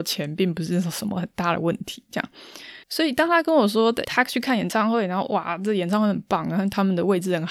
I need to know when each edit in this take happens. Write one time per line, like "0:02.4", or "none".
0:02.8
0:04.0